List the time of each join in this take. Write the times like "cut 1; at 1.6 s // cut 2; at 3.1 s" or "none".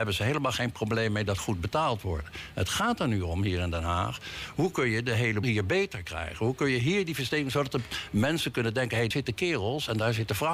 cut 1; at 1.4 s // cut 2; at 5.4 s // cut 3; at 9.1 s